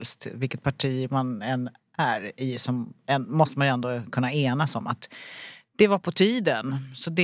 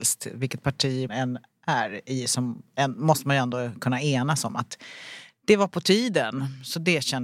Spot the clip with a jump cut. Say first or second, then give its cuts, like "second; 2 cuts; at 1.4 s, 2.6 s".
second; 1 cut; at 1.1 s